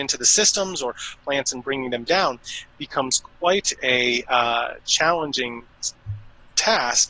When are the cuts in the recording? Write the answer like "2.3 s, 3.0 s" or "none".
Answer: 1.2 s